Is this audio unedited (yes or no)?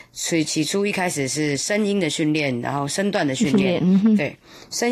yes